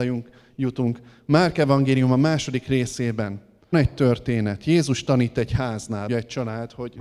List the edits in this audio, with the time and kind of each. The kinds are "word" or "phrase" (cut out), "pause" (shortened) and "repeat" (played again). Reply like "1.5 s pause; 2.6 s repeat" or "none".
3.7 s word; 6.1 s word

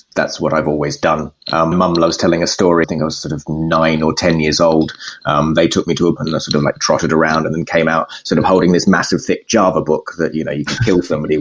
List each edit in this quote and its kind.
1.7 s word; 2.8 s phrase; 6.2 s word

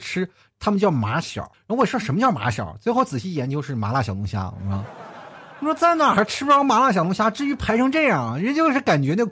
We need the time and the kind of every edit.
1.5 s pause

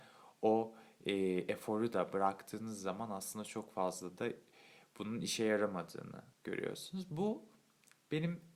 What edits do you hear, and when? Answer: 6.3 s pause

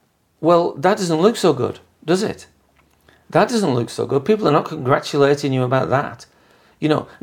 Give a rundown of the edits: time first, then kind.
none

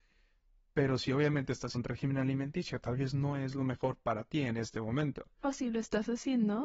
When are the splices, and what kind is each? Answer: 1.7 s word

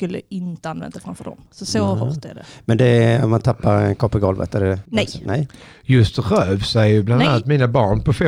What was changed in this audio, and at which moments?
4.9 s pause

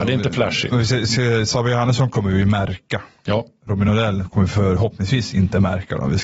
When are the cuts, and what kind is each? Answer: none

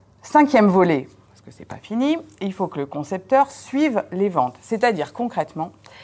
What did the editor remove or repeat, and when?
none

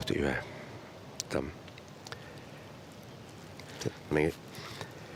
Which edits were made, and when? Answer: 1.2 s word; 4.1 s word

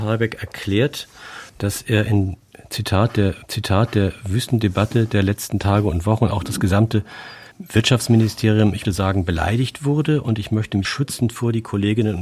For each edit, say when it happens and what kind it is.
1.5 s word; 3.4 s repeat; 7.5 s pause; 8.8 s word; 10.8 s word

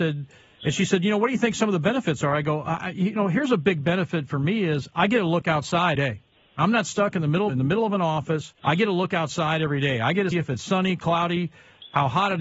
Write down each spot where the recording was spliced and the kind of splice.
6.0 s word; 7.5 s phrase; 8.6 s pause; 10.3 s word

